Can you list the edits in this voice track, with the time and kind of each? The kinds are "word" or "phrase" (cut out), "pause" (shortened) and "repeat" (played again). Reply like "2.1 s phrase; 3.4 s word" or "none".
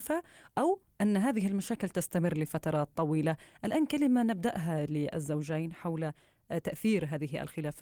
none